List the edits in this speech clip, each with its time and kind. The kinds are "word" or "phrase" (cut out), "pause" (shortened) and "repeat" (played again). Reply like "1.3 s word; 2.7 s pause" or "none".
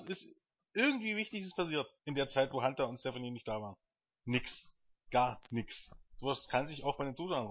2.0 s pause; 6.1 s pause